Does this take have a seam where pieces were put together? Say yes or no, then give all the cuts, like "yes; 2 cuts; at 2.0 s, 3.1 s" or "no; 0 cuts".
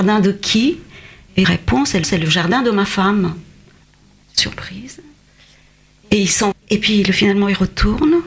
yes; 4 cuts; at 1.4 s, 2.0 s, 3.8 s, 6.5 s